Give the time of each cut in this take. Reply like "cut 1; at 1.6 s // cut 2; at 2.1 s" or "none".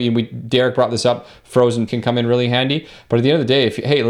cut 1; at 1.9 s